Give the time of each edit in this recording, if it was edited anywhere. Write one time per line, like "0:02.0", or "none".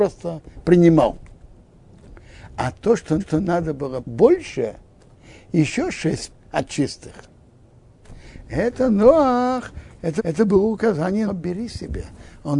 0:03.2
0:04.0
0:06.3
0:10.2
0:11.3